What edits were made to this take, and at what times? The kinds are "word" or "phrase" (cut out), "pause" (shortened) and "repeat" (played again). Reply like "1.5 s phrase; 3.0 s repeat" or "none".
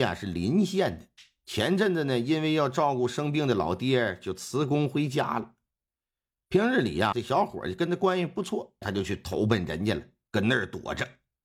7.1 s word; 8.8 s word